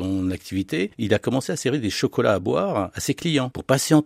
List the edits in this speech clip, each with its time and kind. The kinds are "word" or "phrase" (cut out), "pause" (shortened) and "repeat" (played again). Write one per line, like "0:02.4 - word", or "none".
none